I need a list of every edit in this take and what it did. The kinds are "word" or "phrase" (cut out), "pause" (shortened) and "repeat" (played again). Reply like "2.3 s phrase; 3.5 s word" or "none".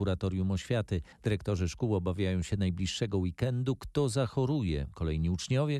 1.1 s pause